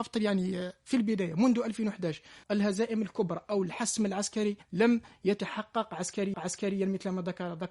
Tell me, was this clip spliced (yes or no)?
yes